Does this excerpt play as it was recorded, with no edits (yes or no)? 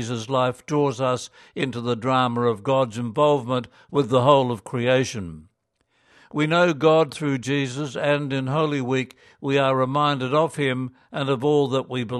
yes